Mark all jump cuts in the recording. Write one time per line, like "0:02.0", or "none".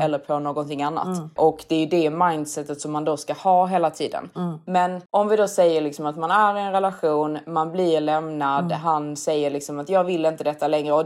0:05.1

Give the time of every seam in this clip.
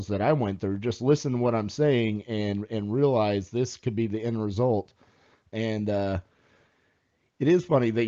none

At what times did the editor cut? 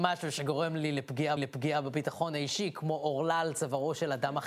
0:01.4

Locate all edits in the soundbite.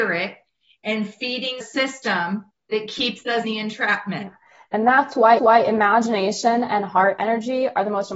0:01.6
0:02.5
0:03.4
0:05.4

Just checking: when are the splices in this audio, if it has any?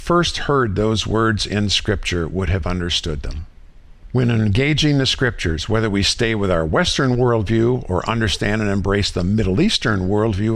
none

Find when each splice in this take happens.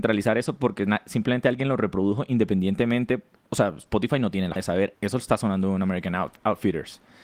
0:04.6
0:04.9

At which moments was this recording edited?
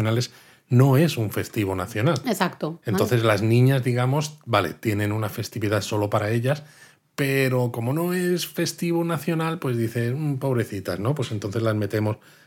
none

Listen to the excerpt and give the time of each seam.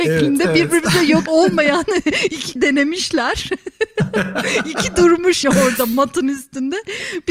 0:01.3
0:02.6
0:05.4

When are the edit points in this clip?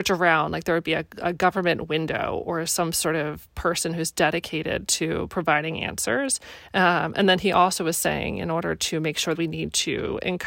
0:09.3

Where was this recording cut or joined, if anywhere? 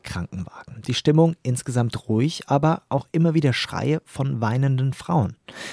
none

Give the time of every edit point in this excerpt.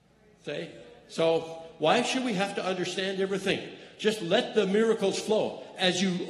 none

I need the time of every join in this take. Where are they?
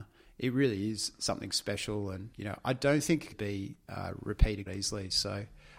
0:02.3
0:03.3
0:04.7

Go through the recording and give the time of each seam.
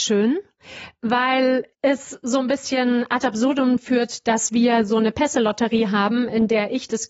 0:01.7

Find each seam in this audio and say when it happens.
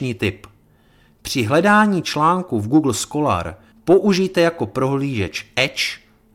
0:03.7

